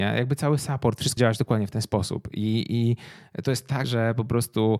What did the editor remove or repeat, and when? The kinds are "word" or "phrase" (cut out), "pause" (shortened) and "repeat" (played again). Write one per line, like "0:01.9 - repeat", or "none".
0:01.2 - word
0:03.8 - word